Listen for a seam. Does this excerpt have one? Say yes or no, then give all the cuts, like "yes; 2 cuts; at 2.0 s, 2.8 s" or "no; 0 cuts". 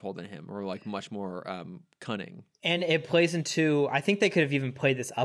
no; 0 cuts